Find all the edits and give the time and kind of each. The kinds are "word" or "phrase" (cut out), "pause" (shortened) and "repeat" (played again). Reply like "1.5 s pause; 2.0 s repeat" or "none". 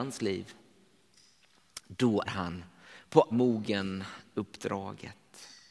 2.3 s word; 3.3 s word